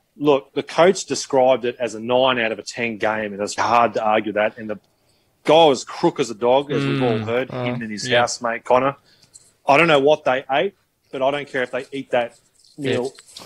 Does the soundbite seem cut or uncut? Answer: cut